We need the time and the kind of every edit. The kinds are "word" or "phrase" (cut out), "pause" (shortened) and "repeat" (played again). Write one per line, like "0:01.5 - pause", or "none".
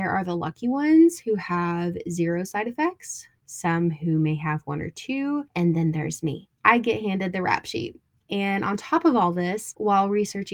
none